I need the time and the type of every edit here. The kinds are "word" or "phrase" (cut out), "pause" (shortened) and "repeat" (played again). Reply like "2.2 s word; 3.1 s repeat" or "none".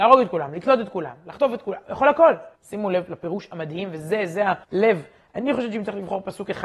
2.6 s pause; 4.6 s pause